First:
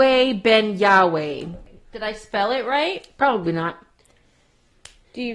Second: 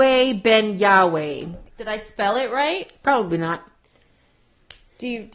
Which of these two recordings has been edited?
second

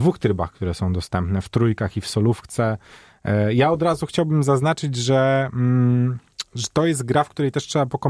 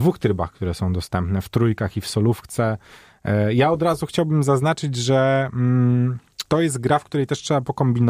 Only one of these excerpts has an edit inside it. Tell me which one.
second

